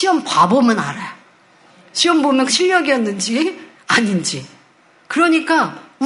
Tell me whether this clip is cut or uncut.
cut